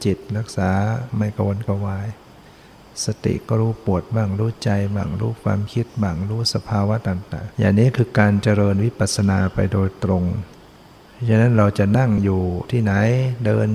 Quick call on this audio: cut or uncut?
cut